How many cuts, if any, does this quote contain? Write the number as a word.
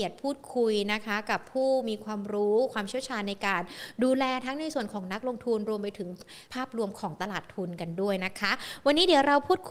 one